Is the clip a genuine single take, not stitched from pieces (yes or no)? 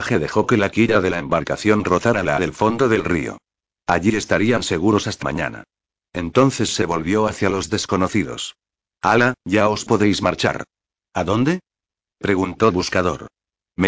no